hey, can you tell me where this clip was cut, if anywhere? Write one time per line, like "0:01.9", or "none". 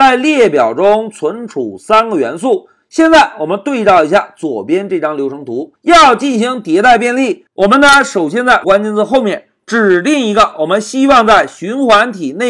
0:05.7
0:08.6